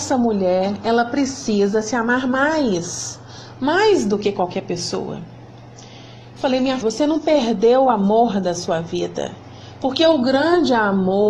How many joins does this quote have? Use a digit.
1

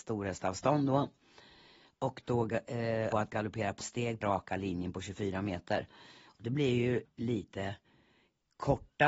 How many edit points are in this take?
4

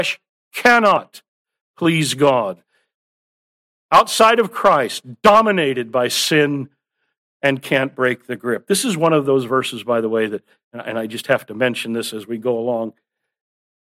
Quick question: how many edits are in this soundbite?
0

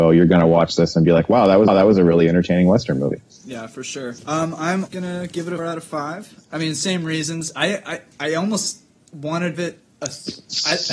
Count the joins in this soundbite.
5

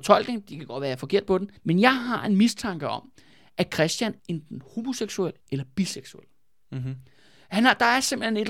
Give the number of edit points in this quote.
3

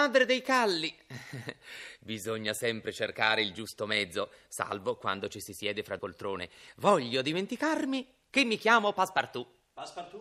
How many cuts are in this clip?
1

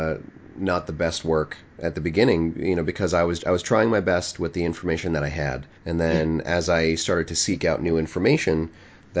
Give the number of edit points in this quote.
2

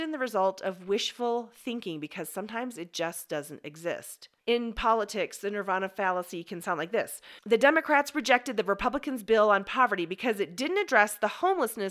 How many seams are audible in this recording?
2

